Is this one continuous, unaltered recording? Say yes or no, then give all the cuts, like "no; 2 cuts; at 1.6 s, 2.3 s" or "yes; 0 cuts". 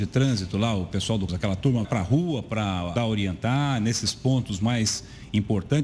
no; 3 cuts; at 1.3 s, 1.8 s, 3.0 s